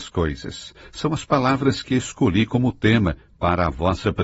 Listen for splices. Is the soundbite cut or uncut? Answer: uncut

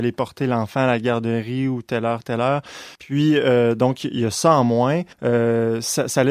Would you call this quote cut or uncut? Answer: cut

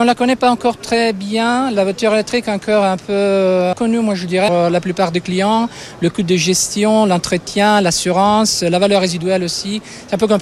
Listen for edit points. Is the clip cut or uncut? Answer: cut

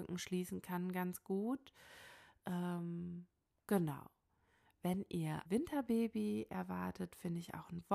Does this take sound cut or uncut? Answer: cut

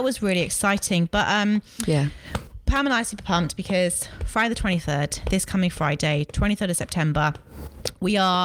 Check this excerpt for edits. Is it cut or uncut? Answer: uncut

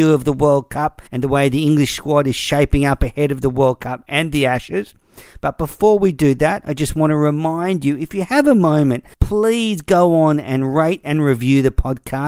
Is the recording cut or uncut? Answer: cut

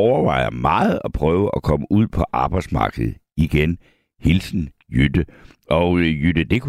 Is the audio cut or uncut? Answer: uncut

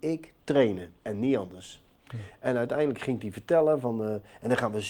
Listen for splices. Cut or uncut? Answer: cut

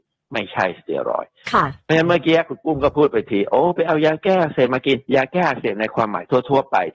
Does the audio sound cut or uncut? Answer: cut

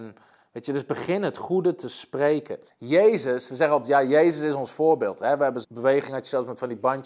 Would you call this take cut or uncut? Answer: cut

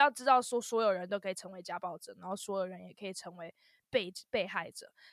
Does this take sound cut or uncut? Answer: uncut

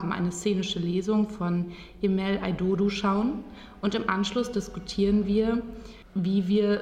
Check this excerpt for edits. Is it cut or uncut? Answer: uncut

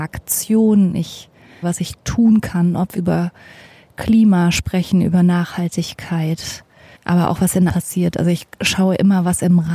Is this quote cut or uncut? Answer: cut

